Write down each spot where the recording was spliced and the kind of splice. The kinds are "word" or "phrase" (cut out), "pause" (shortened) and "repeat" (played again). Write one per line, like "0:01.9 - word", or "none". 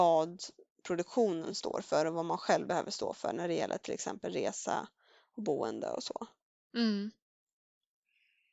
none